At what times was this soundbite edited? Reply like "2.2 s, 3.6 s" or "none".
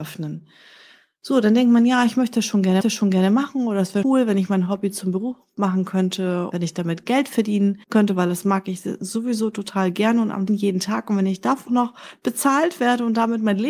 2.8 s, 4.0 s, 6.5 s, 7.8 s, 10.5 s, 11.7 s